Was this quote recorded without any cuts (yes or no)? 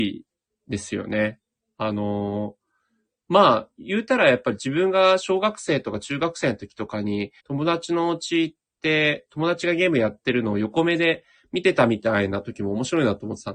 no